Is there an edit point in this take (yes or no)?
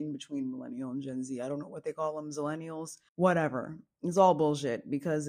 yes